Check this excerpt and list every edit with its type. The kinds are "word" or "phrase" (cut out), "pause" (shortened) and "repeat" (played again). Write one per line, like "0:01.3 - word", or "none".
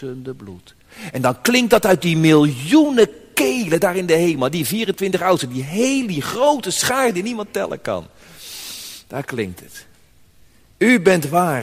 none